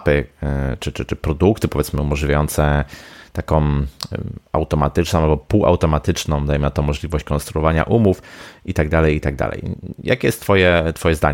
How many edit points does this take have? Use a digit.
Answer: 1